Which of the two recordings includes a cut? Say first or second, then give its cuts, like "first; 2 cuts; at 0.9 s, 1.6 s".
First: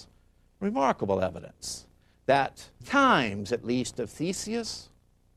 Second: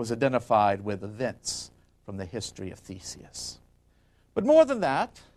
first; 1 cut; at 2.8 s